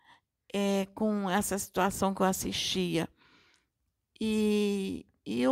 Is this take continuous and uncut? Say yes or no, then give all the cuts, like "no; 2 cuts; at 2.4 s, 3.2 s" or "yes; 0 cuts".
yes; 0 cuts